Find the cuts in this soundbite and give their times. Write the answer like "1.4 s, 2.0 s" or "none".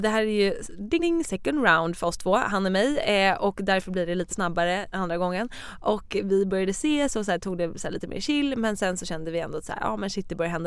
1.0 s, 4.3 s, 4.9 s